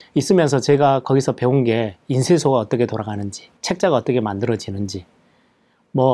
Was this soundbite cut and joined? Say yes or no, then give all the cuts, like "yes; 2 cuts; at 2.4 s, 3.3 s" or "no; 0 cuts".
yes; 1 cut; at 3.6 s